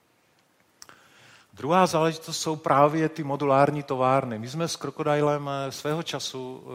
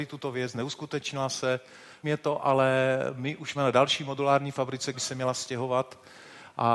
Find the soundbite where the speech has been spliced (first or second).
second